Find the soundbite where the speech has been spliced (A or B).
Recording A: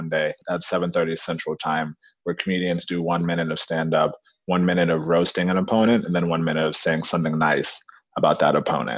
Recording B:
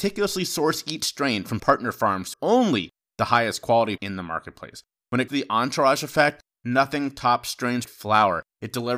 B